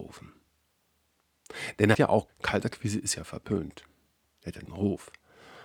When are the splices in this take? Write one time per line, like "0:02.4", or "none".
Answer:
0:01.9
0:02.3
0:04.7